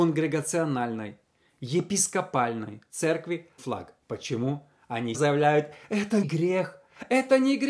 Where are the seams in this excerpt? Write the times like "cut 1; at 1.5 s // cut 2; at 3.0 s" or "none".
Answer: cut 1; at 3.6 s // cut 2; at 4.0 s // cut 3; at 5.1 s // cut 4; at 6.2 s

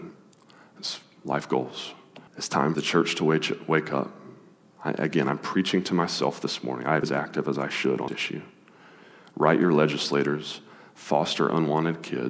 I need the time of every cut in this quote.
cut 1; at 2.3 s // cut 2; at 2.7 s // cut 3; at 7.0 s // cut 4; at 8.1 s

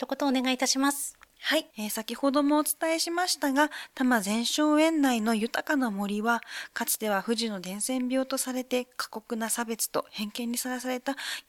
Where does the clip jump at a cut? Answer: cut 1; at 1.3 s // cut 2; at 1.7 s

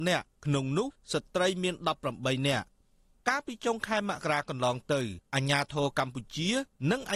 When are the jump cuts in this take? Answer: none

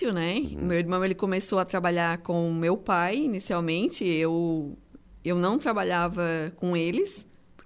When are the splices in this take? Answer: cut 1; at 5.2 s

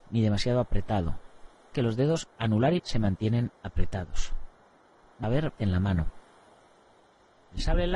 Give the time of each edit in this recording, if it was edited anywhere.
cut 1; at 1.7 s // cut 2; at 2.8 s // cut 3; at 5.2 s // cut 4; at 5.6 s

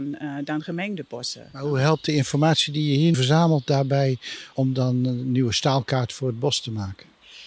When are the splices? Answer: cut 1; at 3.1 s // cut 2; at 4.5 s

